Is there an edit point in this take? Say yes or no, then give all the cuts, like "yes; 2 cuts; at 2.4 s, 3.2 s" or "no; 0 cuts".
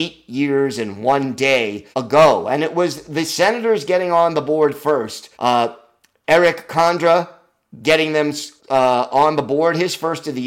yes; 3 cuts; at 1.9 s, 5.3 s, 8.6 s